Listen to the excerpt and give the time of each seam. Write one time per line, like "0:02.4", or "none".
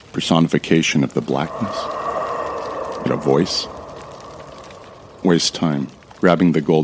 0:03.1
0:05.2